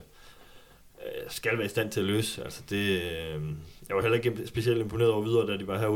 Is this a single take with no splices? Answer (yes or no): yes